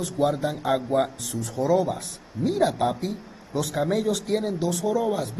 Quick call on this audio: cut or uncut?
cut